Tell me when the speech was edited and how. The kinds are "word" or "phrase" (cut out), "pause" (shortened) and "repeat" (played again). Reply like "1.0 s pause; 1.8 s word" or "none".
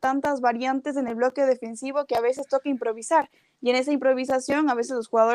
none